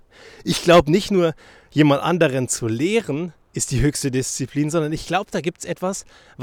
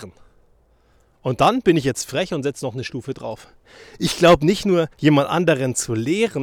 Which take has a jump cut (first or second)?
second